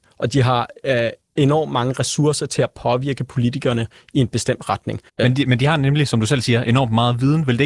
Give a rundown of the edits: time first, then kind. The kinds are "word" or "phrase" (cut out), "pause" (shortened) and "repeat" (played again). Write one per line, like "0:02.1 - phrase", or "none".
0:05.1 - pause